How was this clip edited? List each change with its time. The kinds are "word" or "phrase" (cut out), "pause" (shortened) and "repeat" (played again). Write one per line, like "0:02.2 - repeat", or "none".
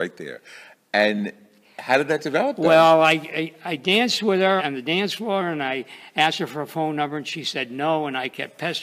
0:04.6 - phrase